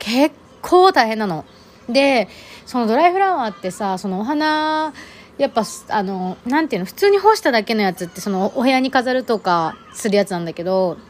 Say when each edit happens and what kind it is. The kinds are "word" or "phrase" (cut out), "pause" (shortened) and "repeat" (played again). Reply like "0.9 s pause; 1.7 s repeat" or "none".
6.4 s pause